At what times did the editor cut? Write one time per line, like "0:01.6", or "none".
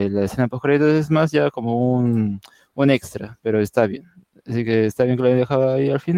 none